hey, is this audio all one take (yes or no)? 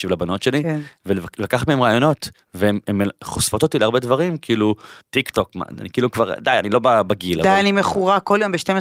no